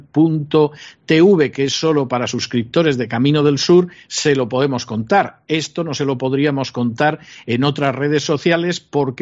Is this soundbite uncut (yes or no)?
yes